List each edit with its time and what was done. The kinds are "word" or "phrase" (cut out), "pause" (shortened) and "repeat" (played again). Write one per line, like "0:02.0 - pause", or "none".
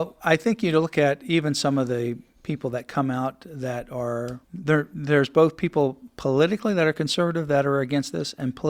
0:04.4 - pause